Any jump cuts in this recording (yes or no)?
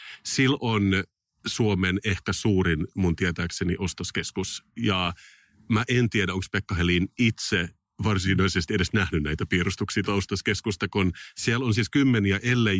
yes